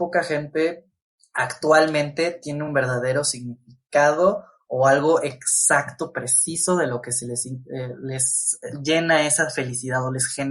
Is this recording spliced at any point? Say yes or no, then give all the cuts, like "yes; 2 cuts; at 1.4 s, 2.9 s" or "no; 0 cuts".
no; 0 cuts